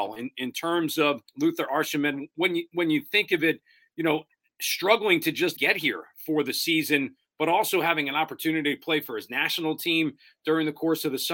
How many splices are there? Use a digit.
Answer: 2